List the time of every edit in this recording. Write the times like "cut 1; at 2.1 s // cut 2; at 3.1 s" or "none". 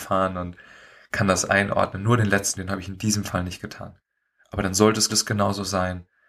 cut 1; at 2.6 s // cut 2; at 5.1 s